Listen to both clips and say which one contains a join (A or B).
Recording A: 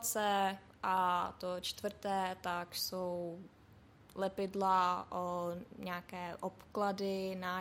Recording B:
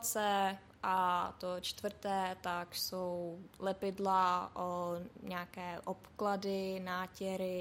B